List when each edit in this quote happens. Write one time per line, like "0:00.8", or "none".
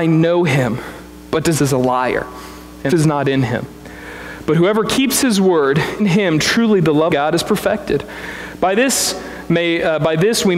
0:01.5
0:02.9
0:06.0
0:07.1